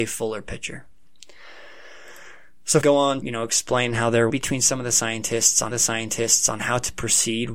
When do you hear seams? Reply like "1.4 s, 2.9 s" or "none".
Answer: 2.8 s, 3.2 s, 4.3 s, 5.7 s

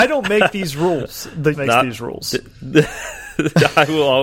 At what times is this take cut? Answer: 1.5 s

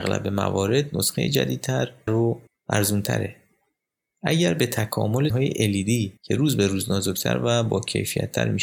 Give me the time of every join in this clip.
2.1 s, 2.5 s, 5.3 s, 6.2 s

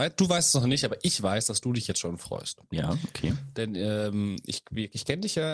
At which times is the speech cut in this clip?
none

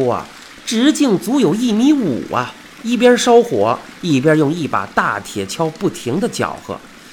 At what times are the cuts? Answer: 2.7 s

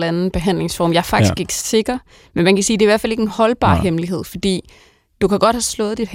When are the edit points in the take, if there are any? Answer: none

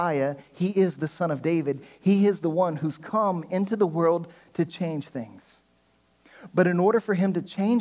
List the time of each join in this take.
none

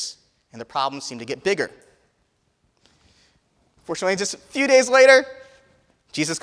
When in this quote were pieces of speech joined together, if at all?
none

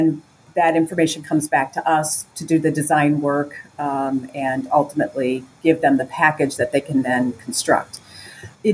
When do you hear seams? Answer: 2.3 s

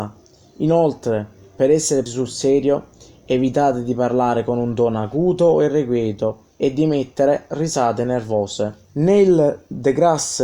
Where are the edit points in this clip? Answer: 2.1 s, 6.5 s, 8.8 s

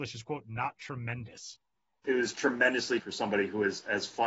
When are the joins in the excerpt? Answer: 2.0 s, 3.0 s

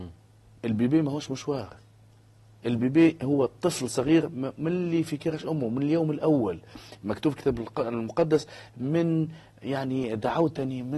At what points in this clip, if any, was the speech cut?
none

